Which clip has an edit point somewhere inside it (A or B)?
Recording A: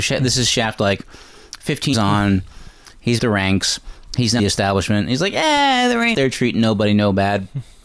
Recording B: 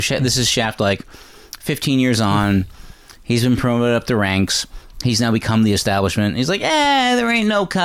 A